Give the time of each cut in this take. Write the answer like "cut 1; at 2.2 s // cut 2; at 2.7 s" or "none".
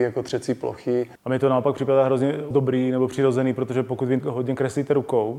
cut 1; at 1.2 s // cut 2; at 2.5 s // cut 3; at 4.2 s